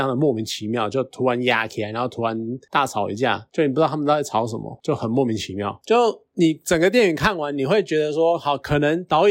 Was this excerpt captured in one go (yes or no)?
yes